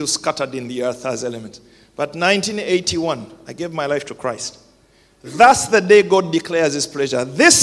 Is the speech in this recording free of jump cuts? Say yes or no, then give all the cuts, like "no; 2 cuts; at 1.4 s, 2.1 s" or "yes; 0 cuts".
yes; 0 cuts